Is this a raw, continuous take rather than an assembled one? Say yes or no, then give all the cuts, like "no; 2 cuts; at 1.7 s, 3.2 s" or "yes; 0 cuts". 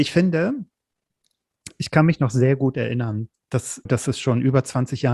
no; 1 cut; at 3.9 s